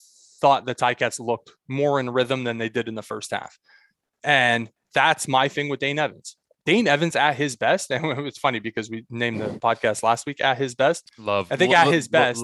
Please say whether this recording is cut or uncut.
uncut